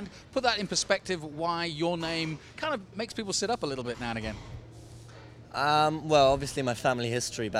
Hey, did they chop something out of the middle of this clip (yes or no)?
no